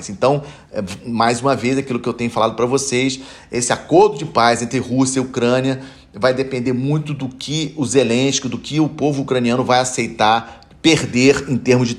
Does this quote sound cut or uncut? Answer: uncut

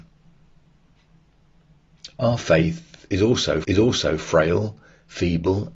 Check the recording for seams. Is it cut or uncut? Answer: cut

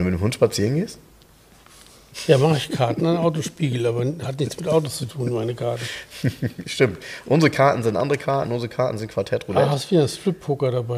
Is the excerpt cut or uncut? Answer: uncut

